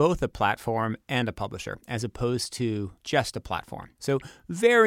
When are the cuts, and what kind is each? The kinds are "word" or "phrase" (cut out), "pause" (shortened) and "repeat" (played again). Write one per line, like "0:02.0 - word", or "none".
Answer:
0:03.0 - pause
0:03.9 - pause